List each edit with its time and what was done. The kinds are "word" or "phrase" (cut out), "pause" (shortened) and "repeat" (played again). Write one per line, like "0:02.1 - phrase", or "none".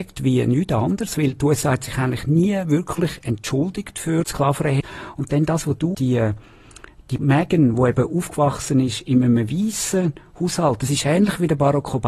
0:04.2 - word
0:05.9 - word
0:07.2 - word